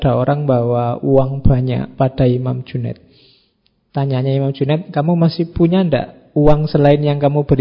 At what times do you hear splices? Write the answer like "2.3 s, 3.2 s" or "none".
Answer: none

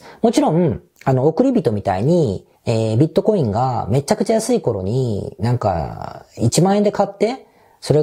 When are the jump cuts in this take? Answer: 2.6 s

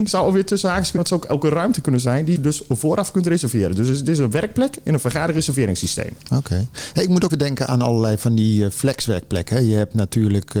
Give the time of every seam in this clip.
1.0 s, 2.4 s, 7.3 s

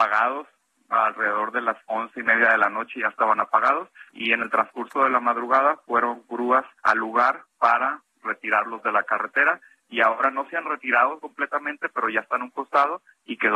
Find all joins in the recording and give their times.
1.8 s, 4.1 s, 6.8 s, 7.5 s

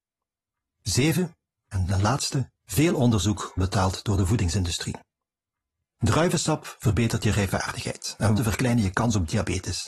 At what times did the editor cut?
2.6 s, 3.6 s, 8.4 s

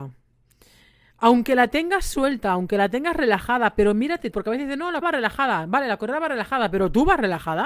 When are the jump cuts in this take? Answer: 4.3 s, 5.0 s

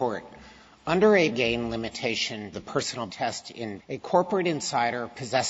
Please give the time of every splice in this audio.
1.3 s, 2.5 s, 3.1 s, 3.8 s

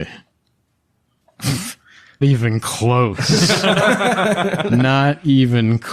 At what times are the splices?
2.2 s

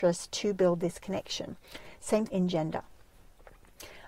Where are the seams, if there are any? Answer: 2.3 s

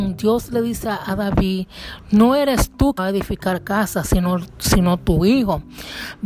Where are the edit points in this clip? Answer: 3.0 s

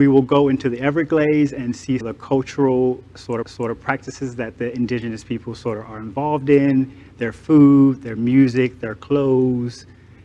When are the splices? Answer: 2.0 s, 3.4 s

